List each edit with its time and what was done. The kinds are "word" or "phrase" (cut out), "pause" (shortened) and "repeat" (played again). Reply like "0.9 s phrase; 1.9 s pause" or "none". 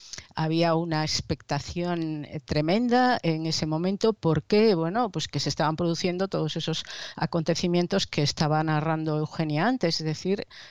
none